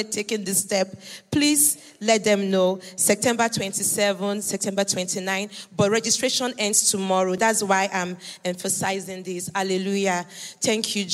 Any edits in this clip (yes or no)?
no